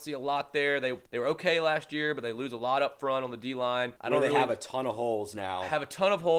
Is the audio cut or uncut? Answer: cut